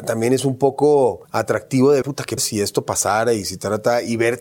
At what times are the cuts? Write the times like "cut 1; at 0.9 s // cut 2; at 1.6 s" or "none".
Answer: cut 1; at 1.2 s // cut 2; at 2.0 s // cut 3; at 2.4 s